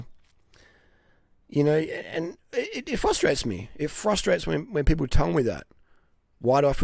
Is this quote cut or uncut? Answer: uncut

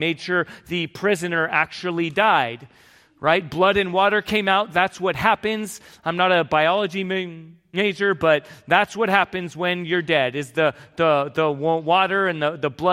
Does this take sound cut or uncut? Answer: uncut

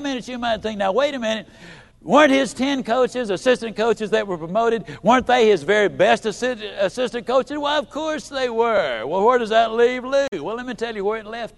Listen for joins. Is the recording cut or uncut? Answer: cut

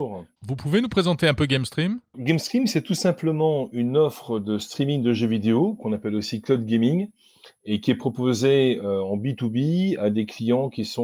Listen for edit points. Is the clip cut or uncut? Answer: cut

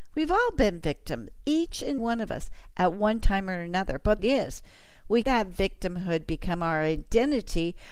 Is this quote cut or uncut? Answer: cut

